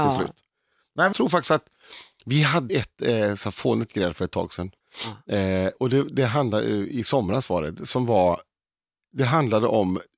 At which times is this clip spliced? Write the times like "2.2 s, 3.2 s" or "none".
1.1 s, 2.1 s, 2.7 s, 4.8 s